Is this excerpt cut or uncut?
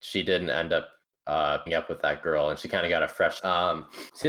cut